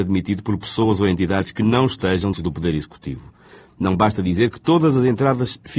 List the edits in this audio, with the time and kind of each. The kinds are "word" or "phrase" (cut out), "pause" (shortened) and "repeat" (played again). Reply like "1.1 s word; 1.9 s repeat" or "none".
2.3 s word